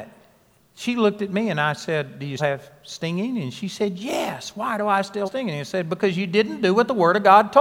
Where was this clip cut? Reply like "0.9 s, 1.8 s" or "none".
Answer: 2.4 s, 5.2 s